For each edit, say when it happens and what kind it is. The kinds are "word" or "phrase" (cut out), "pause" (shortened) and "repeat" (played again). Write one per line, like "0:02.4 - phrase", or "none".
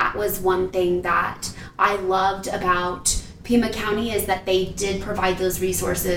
none